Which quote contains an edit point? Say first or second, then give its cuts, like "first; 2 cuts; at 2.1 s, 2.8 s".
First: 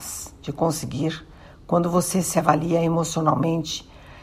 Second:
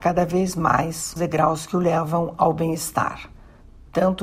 second; 1 cut; at 1.2 s